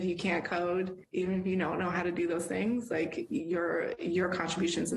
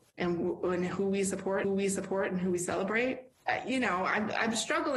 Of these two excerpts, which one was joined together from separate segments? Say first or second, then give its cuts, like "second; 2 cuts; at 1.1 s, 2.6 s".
second; 1 cut; at 1.6 s